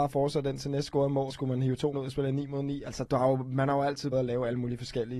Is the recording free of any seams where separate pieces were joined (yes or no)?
no